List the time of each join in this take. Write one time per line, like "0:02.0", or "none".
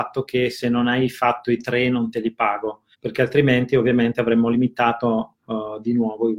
0:02.9